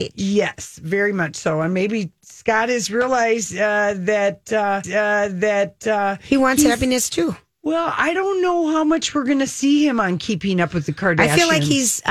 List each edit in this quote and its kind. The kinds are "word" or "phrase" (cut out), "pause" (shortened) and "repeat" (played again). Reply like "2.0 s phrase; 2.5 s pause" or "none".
4.8 s repeat